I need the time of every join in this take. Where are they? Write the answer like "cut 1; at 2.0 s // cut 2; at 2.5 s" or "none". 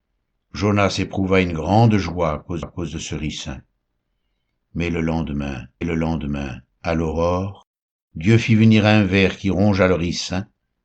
cut 1; at 2.6 s // cut 2; at 5.8 s